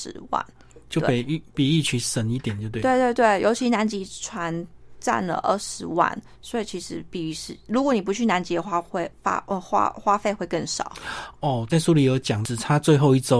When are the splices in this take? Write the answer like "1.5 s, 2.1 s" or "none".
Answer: 11.7 s